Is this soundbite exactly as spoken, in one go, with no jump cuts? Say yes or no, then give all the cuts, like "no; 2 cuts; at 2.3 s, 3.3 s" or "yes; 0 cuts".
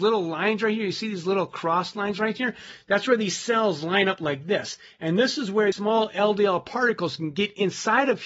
no; 1 cut; at 5.7 s